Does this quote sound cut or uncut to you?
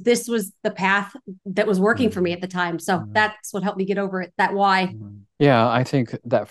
cut